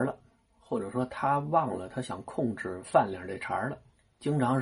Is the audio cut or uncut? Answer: uncut